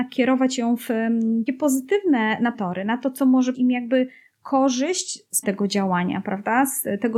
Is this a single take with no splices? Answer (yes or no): no